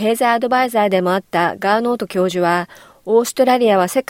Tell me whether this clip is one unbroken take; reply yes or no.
yes